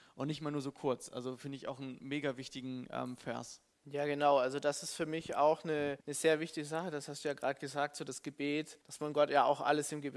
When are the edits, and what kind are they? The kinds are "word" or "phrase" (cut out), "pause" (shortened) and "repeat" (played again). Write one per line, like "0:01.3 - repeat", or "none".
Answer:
0:03.7 - pause
0:06.0 - pause
0:08.8 - pause

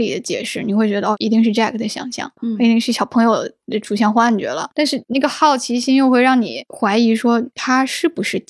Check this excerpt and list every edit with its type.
none

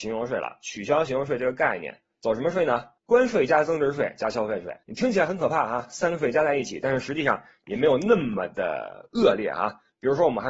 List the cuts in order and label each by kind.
0:03.0 - pause
0:04.8 - pause

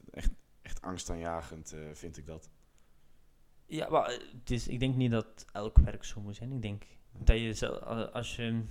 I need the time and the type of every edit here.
none

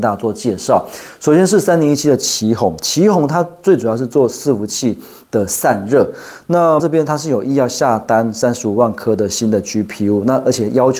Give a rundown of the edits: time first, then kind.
0:06.8 - word

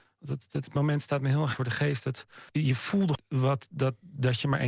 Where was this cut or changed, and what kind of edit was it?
0:01.5 - word
0:02.5 - pause
0:03.1 - word

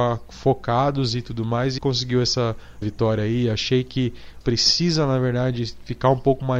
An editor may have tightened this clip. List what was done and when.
0:01.8 - phrase
0:02.8 - word
0:04.4 - phrase

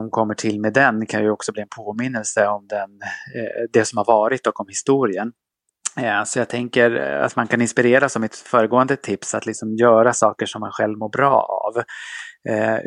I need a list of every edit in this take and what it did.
none

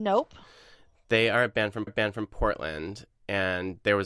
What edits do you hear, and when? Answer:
0:01.9 - repeat

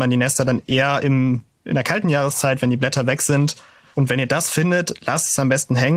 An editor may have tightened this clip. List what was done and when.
none

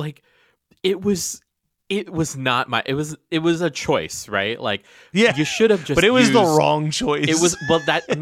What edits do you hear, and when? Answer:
none

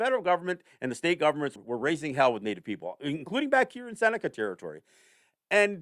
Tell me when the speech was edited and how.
0:01.6 - word

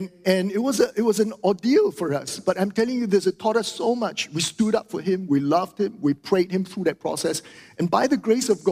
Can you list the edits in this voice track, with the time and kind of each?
none

